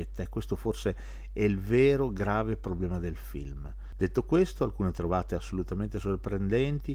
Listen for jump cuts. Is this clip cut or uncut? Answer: uncut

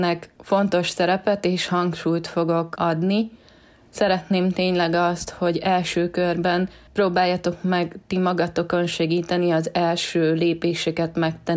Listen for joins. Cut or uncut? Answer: uncut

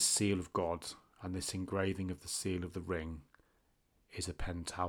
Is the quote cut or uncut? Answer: uncut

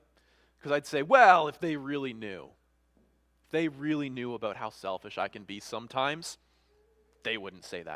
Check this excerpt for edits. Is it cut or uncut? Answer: uncut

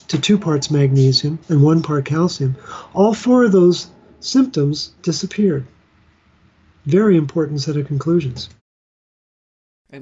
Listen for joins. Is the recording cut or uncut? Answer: cut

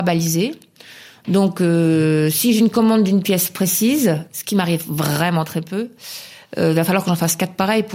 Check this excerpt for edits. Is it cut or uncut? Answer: uncut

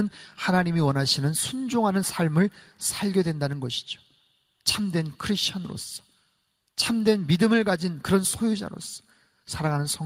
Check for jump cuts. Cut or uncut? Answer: uncut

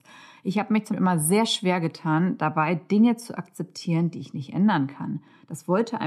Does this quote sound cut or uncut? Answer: cut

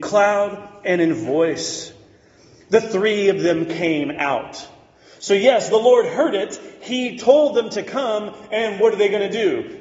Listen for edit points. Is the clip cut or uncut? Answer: uncut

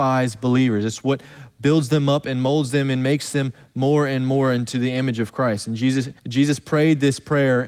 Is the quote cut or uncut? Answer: cut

